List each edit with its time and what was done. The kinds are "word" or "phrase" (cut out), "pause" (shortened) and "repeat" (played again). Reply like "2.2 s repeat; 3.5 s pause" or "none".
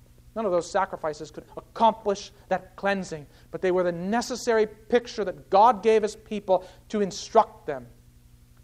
1.5 s word